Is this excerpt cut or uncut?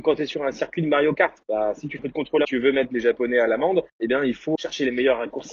cut